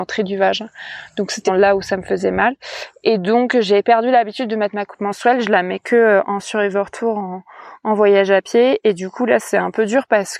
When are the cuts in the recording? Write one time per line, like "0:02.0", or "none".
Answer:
0:01.5